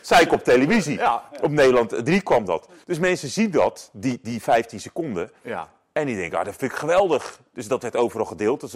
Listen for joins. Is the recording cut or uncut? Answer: cut